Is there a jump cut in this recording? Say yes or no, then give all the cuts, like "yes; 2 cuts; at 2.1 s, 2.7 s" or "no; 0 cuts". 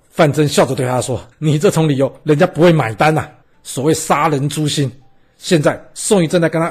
yes; 2 cuts; at 1.3 s, 3.4 s